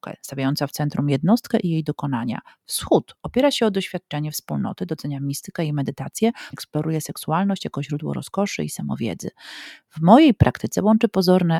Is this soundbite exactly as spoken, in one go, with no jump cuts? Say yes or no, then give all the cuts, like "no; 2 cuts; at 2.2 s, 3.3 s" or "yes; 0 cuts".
no; 1 cut; at 6.5 s